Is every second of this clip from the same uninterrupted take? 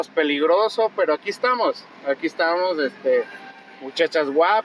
yes; 0 cuts

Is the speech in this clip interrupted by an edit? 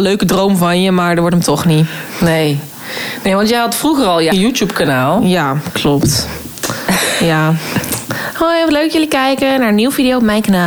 yes; 1 cut; at 4.3 s

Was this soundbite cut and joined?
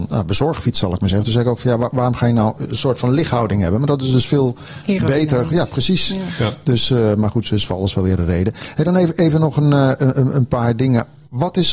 no; 0 cuts

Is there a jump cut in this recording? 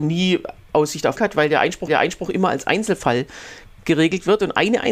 yes; 2 cuts; at 1.2 s, 1.9 s

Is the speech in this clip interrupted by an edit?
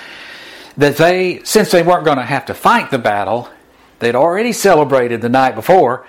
no; 0 cuts

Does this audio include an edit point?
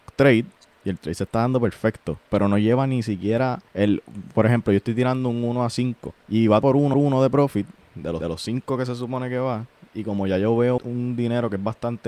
yes; 6 cuts; at 3.7 s, 6.2 s, 6.6 s, 6.9 s, 8.2 s, 10.8 s

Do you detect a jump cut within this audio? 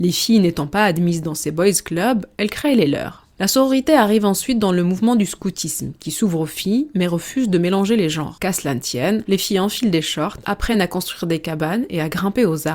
no; 0 cuts

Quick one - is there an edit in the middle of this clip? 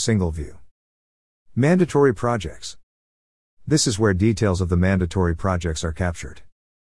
no; 0 cuts

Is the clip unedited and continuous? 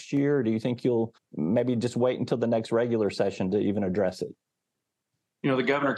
no; 1 cut; at 1.2 s

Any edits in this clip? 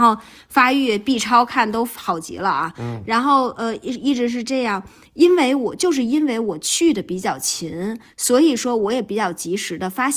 no; 0 cuts

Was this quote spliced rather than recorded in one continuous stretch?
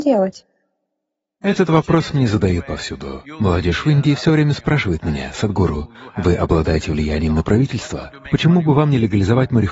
no; 0 cuts

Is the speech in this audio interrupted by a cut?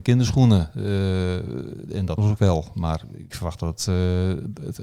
yes; 2 cuts; at 2.2 s, 3.3 s

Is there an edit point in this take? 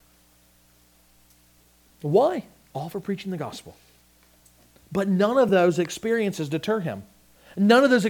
no; 0 cuts

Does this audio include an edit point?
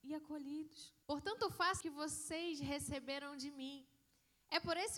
yes; 2 cuts; at 1.0 s, 1.8 s

